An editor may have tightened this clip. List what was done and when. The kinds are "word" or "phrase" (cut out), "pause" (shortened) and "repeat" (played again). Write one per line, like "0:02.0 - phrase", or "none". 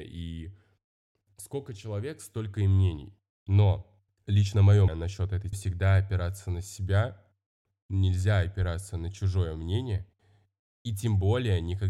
0:04.1 - pause
0:04.9 - word
0:05.5 - phrase